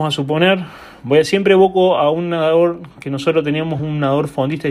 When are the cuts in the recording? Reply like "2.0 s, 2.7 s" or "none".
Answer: none